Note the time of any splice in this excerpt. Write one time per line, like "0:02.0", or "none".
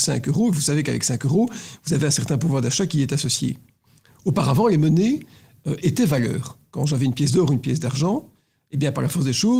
none